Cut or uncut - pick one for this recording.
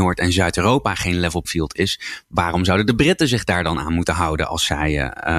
cut